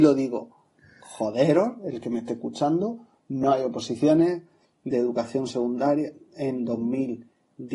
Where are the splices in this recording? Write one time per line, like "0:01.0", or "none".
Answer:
none